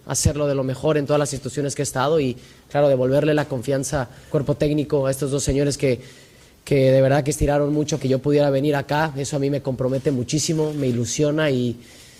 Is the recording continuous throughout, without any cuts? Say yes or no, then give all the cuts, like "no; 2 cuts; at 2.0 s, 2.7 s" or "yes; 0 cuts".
no; 2 cuts; at 4.3 s, 8.0 s